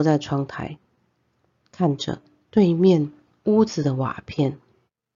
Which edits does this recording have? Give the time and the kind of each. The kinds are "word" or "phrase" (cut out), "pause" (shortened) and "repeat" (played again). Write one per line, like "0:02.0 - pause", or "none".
none